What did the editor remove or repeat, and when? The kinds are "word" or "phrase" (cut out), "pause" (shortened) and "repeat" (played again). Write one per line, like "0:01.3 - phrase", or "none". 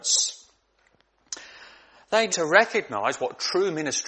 0:02.3 - word